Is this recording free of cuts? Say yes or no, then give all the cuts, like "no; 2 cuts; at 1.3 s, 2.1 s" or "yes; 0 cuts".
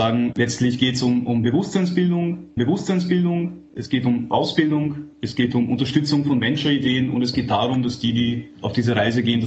no; 2 cuts; at 2.6 s, 5.1 s